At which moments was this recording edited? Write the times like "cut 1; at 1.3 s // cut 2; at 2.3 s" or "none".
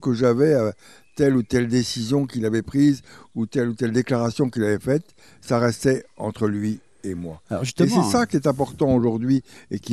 none